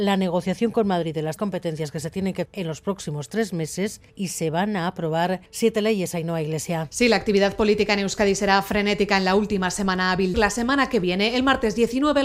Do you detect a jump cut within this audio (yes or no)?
yes